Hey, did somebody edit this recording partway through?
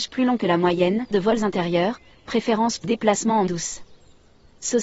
yes; 3 cuts; at 1.1 s, 2.8 s, 3.5 s

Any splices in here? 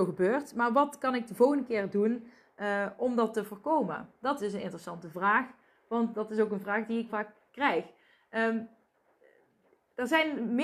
yes; 2 cuts; at 4.4 s, 7.1 s

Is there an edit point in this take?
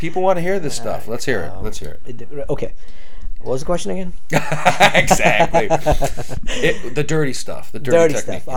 no; 0 cuts

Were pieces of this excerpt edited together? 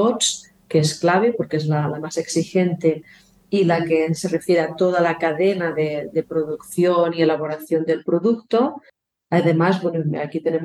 no; 0 cuts

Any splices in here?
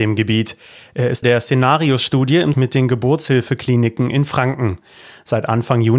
yes; 2 cuts; at 1.2 s, 2.5 s

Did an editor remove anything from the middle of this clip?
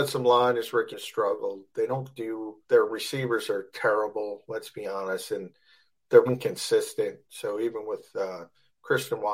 yes; 3 cuts; at 0.9 s, 2.6 s, 6.3 s

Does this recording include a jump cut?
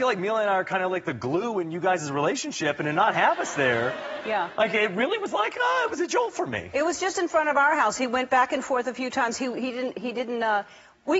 no; 0 cuts

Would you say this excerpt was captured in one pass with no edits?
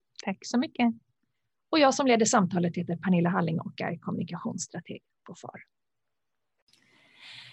yes; 0 cuts

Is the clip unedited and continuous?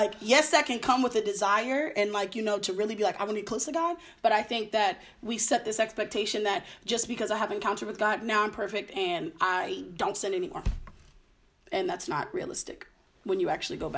yes; 0 cuts

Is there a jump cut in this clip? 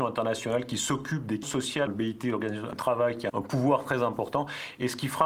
yes; 4 cuts; at 1.4 s, 1.9 s, 2.7 s, 3.3 s

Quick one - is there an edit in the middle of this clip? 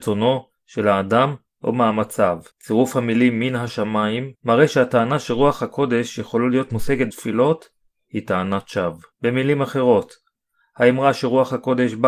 yes; 4 cuts; at 2.5 s, 4.3 s, 7.1 s, 9.1 s

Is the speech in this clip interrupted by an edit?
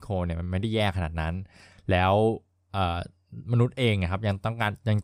no; 0 cuts

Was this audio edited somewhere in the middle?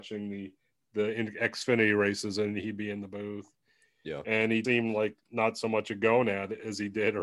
yes; 1 cut; at 4.6 s

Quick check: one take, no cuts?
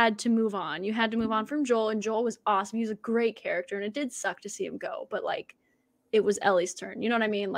yes; 0 cuts

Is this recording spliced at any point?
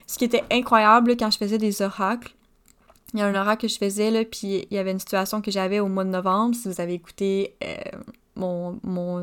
no; 0 cuts

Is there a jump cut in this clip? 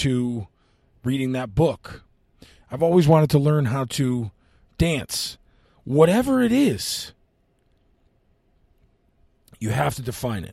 no; 0 cuts

